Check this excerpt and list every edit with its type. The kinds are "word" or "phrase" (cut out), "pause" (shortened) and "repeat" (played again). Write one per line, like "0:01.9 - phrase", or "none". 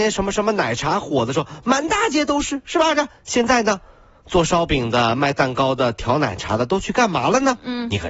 none

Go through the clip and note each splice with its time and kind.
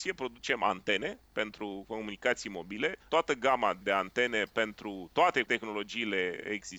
0:01.2 - pause
0:03.0 - pause

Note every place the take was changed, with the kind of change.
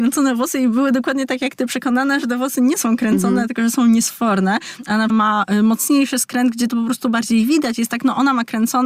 0:05.1 - phrase

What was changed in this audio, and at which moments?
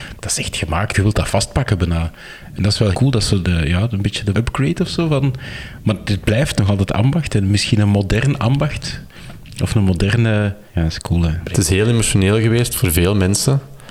0:00.9 - word
0:02.9 - word
0:03.4 - word
0:04.3 - word
0:10.7 - pause

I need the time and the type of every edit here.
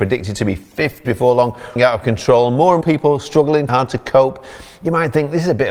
0:01.0 - word
0:01.8 - word
0:02.8 - word
0:03.7 - word

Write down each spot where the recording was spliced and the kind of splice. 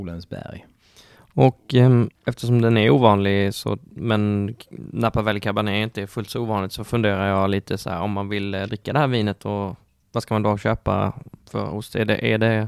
0:02.2 - pause
0:10.0 - pause
0:11.4 - pause

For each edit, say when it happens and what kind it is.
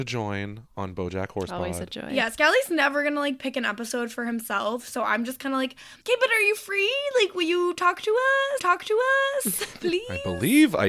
0:06.0 - pause
0:08.6 - repeat

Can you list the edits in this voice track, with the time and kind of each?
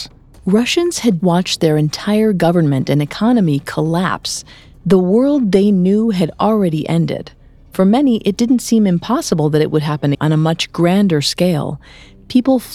0:01.2 - word
0:10.1 - phrase

